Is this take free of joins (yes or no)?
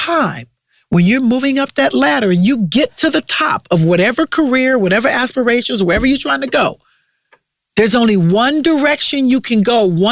yes